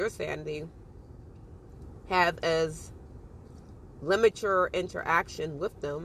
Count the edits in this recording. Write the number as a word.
zero